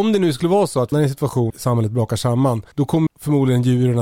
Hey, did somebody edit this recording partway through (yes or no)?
yes